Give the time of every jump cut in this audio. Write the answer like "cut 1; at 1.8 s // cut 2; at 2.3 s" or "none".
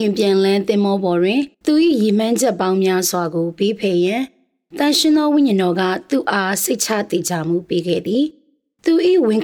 cut 1; at 1.5 s